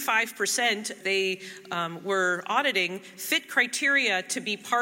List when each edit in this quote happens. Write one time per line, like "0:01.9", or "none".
0:01.0